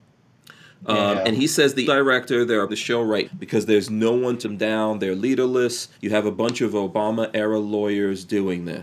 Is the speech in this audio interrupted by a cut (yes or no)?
yes